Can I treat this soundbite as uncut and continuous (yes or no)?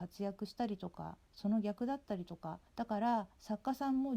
no